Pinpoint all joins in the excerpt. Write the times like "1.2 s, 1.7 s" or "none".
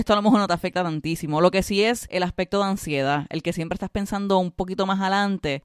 none